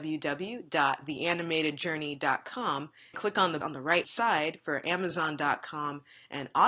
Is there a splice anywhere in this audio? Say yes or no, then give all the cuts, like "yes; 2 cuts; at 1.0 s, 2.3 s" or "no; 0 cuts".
yes; 3 cuts; at 3.1 s, 3.6 s, 4.0 s